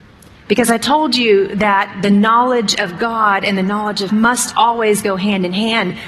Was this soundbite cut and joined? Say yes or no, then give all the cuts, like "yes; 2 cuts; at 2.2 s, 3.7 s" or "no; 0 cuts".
yes; 1 cut; at 4.1 s